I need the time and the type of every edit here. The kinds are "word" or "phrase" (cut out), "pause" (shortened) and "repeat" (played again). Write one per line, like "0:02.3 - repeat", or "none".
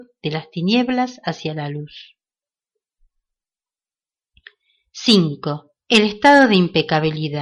none